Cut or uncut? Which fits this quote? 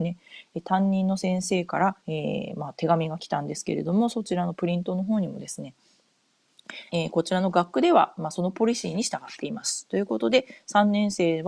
cut